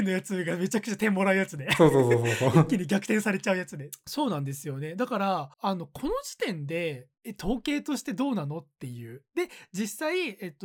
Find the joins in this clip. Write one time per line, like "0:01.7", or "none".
0:05.5
0:07.1